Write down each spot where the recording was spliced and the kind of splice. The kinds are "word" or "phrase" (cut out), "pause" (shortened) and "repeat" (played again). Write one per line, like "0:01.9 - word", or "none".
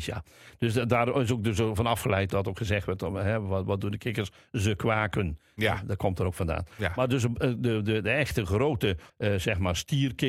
0:02.3 - word
0:09.1 - pause